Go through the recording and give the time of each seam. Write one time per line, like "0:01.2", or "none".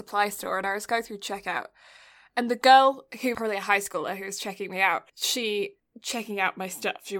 0:03.3
0:05.1